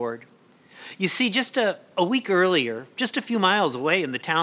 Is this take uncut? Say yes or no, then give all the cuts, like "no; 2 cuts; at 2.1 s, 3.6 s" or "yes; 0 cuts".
yes; 0 cuts